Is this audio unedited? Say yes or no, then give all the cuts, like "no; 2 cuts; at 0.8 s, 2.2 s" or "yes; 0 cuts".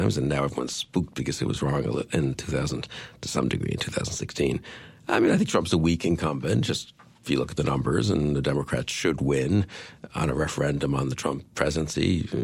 yes; 0 cuts